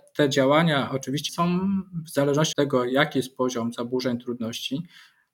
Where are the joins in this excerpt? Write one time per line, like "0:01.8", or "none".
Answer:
0:01.3
0:02.5